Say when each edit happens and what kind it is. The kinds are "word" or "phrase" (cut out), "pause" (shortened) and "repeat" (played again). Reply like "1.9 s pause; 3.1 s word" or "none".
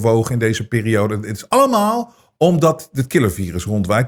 none

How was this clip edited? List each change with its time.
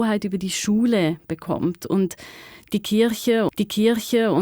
3.5 s repeat

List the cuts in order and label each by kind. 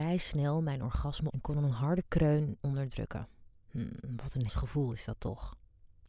1.3 s word; 2.6 s word; 3.6 s pause; 4.5 s word

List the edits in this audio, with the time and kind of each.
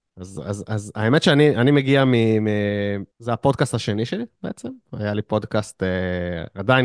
3.1 s pause

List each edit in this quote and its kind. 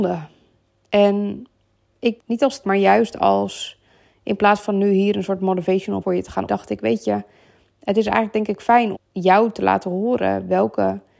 2.2 s word; 2.6 s word; 6.0 s word; 6.5 s word; 8.9 s word

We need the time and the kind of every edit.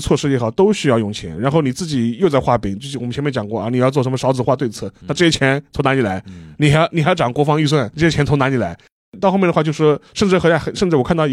7.9 s word; 10.1 s pause

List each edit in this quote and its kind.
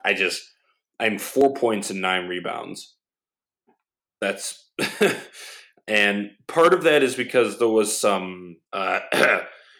8.7 s pause

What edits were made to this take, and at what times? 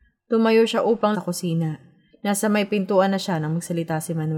1.1 s word

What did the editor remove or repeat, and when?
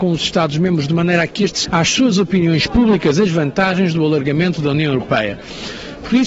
1.6 s word

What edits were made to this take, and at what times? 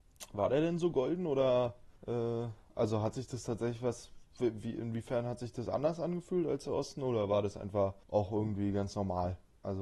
2.0 s pause; 4.3 s pause; 8.0 s pause

